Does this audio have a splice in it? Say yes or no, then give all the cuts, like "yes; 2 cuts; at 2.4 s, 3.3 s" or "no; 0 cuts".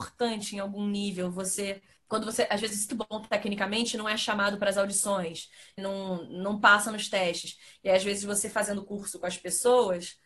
yes; 2 cuts; at 2.9 s, 5.8 s